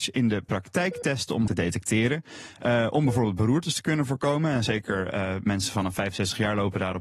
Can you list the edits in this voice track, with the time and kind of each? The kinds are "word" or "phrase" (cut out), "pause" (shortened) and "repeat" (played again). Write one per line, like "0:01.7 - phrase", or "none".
0:01.5 - phrase